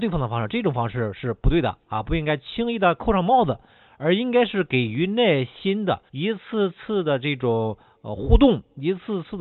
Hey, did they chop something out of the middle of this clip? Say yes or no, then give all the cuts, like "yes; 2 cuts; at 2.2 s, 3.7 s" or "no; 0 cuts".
yes; 1 cut; at 6.1 s